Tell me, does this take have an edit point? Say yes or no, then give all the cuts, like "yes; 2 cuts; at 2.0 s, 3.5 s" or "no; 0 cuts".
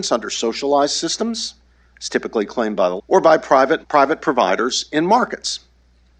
yes; 2 cuts; at 3.0 s, 3.8 s